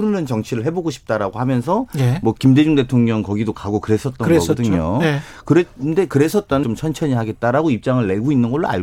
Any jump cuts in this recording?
yes; 1 cut; at 6.6 s

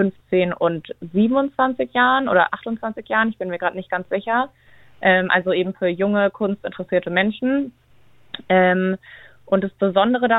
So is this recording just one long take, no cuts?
yes; 0 cuts

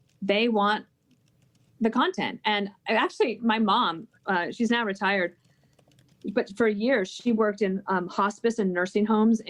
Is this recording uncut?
yes; 0 cuts

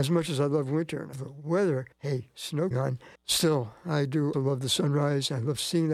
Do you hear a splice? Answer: yes; 5 cuts; at 1.1 s, 1.9 s, 2.7 s, 3.1 s, 4.3 s

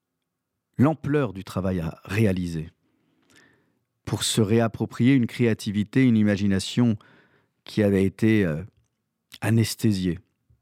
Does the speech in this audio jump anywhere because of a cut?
no; 0 cuts

